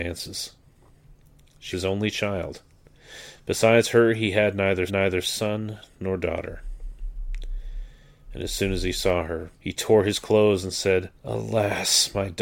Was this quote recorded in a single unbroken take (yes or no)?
no